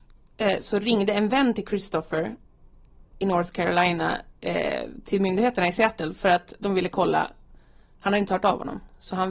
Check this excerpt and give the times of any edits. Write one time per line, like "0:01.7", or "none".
none